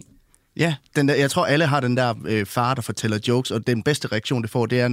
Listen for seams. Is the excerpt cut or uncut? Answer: uncut